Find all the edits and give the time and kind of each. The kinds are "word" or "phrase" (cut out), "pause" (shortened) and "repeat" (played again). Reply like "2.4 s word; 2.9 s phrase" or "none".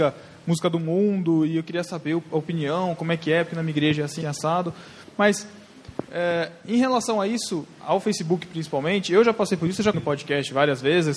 4.2 s word; 9.9 s word